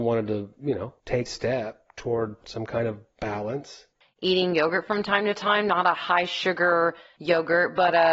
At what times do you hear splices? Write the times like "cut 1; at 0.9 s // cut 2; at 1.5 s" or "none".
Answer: cut 1; at 1.3 s